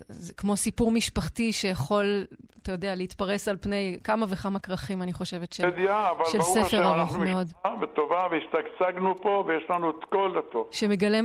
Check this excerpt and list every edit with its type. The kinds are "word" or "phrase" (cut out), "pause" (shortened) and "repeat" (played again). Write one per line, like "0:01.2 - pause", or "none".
none